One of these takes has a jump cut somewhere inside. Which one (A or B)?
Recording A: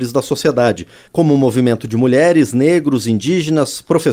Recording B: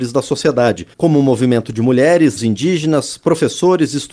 B